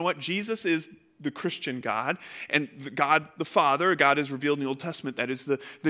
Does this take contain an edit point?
no; 0 cuts

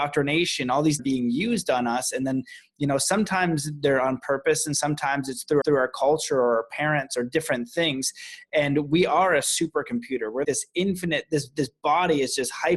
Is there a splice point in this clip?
yes; 3 cuts; at 1.0 s, 5.6 s, 10.4 s

